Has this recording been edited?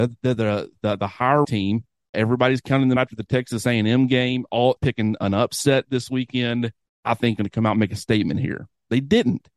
yes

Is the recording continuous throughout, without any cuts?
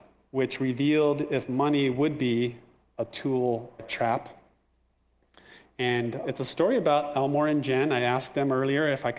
no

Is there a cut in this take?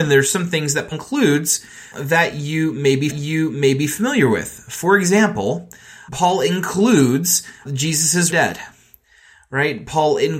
yes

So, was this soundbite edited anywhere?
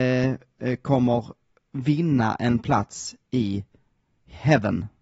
no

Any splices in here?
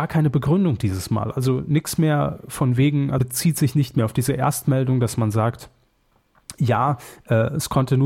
yes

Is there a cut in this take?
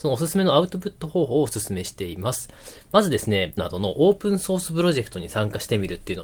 yes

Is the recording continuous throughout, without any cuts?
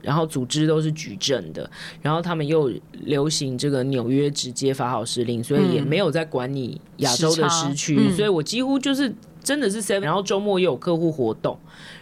no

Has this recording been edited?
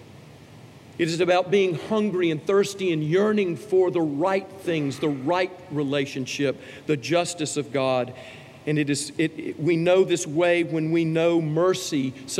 no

